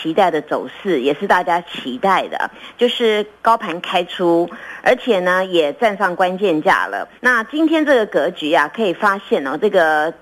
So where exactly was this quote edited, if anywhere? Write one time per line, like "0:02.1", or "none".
0:07.2